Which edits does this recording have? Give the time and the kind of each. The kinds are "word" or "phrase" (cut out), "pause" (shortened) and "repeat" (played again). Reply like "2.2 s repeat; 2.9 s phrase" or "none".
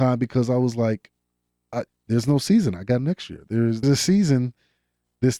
1.9 s pause; 3.8 s word